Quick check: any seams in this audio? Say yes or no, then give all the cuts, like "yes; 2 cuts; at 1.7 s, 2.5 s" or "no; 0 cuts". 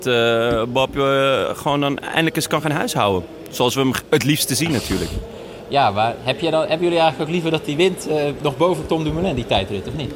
no; 0 cuts